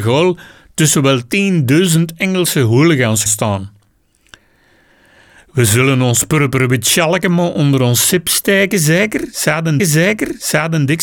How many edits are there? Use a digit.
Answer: 2